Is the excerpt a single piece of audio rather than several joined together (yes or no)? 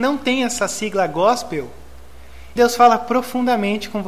no